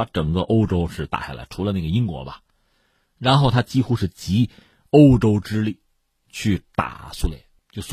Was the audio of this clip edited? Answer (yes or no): no